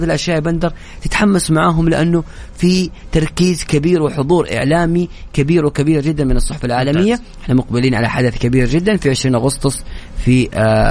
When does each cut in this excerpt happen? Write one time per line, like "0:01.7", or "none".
none